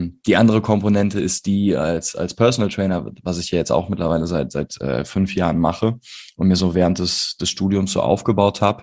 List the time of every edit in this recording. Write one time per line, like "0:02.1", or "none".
none